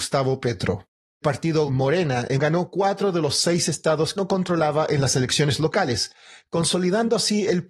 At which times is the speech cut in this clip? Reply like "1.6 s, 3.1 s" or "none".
1.2 s, 1.7 s, 2.4 s, 4.2 s